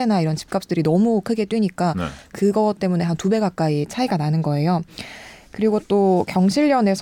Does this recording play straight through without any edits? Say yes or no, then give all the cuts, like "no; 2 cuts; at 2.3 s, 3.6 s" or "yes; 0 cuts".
yes; 0 cuts